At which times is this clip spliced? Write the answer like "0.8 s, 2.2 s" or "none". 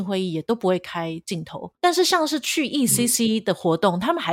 1.8 s